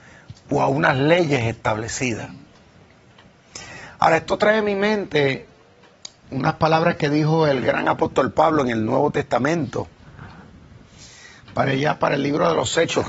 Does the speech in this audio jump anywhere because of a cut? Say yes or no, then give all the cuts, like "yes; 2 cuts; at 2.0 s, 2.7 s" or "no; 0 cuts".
no; 0 cuts